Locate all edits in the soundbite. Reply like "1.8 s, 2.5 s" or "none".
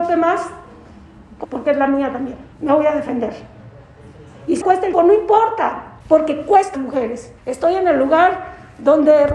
1.4 s, 2.5 s, 4.6 s, 4.9 s, 6.0 s, 6.7 s, 7.4 s